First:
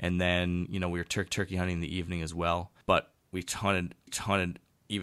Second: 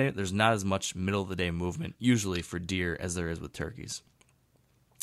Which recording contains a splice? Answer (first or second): first